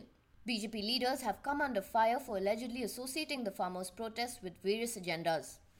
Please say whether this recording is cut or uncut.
uncut